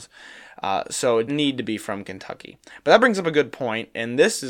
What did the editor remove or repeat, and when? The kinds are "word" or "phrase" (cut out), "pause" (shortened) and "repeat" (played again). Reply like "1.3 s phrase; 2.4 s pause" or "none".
1.3 s word